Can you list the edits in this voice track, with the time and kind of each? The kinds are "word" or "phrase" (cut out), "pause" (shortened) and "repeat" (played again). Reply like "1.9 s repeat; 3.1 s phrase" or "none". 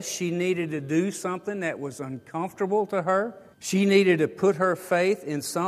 3.5 s pause